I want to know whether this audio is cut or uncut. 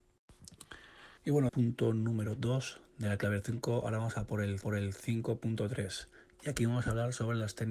cut